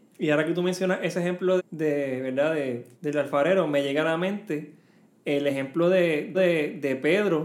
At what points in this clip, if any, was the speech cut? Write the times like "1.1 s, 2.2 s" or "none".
1.6 s, 2.9 s, 6.3 s